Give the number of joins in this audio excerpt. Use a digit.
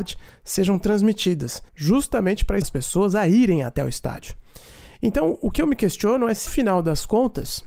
3